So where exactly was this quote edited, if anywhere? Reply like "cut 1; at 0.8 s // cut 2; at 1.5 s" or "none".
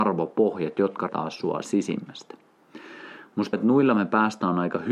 cut 1; at 1.1 s // cut 2; at 1.6 s // cut 3; at 3.5 s